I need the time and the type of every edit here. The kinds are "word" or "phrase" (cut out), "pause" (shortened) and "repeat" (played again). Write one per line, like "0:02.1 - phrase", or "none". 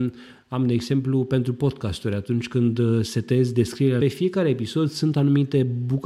0:04.0 - phrase